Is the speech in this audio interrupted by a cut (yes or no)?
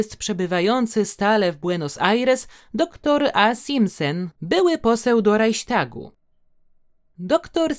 no